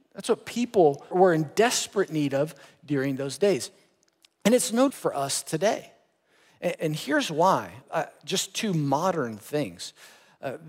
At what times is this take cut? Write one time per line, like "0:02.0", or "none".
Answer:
0:01.1
0:04.9
0:06.7
0:07.8